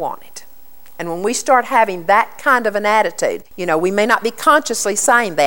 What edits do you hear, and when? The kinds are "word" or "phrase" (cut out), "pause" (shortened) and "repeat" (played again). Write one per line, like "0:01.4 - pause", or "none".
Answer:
0:03.5 - pause